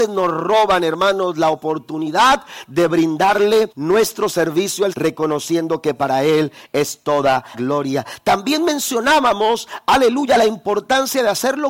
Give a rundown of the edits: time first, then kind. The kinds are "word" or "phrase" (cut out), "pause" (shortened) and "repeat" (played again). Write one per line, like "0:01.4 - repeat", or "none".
0:03.7 - pause
0:04.9 - word
0:07.5 - word